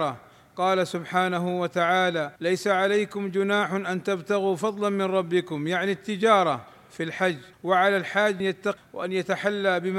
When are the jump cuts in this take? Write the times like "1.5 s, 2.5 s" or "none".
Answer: 2.4 s, 7.5 s, 8.4 s, 8.8 s